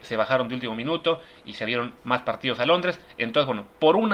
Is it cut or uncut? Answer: uncut